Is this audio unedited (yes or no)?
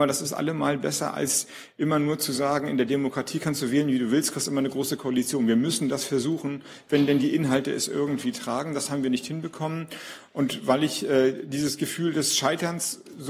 yes